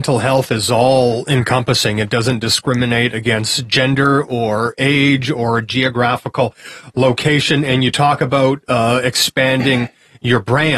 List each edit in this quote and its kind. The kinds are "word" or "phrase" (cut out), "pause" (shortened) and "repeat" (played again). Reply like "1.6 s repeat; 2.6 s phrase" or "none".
none